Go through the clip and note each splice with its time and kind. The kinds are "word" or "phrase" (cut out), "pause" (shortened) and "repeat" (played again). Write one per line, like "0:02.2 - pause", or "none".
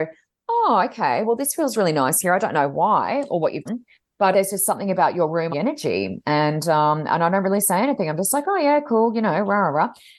0:03.7 - word
0:04.3 - word
0:05.5 - phrase